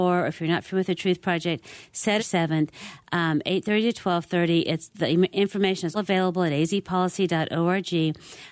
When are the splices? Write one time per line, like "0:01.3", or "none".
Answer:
0:02.2
0:05.9

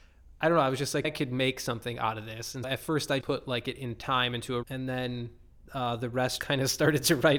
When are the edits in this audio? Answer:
0:01.0
0:02.6
0:03.2
0:04.6
0:06.4

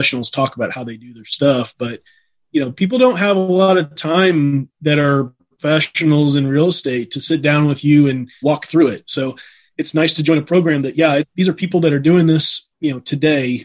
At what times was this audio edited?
0:08.4

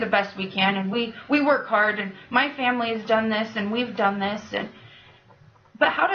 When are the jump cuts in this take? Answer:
none

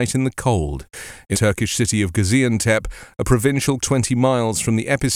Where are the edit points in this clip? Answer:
0:01.3
0:03.8

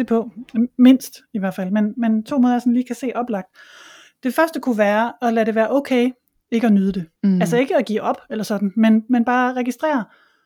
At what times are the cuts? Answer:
0:07.2

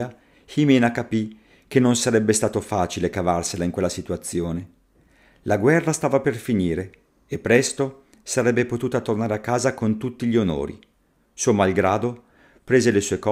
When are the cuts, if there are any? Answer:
none

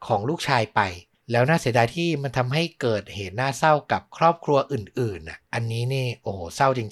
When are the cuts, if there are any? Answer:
0:01.1
0:05.4

